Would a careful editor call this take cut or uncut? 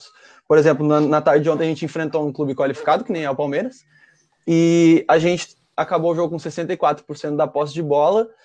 uncut